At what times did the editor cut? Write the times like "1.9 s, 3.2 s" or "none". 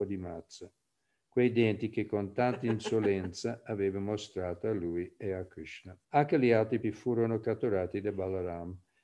6.0 s, 6.8 s